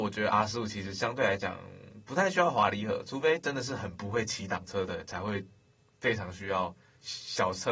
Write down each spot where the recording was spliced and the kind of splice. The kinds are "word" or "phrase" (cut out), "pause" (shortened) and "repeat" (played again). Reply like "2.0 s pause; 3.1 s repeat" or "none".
none